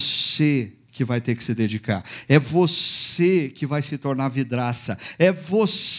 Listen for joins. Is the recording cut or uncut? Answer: uncut